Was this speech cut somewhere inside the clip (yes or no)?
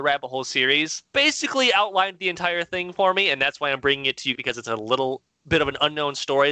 yes